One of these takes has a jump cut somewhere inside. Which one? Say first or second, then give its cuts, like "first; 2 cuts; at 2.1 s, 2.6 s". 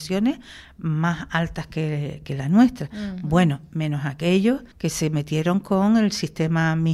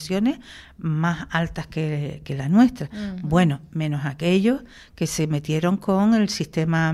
first; 1 cut; at 4.7 s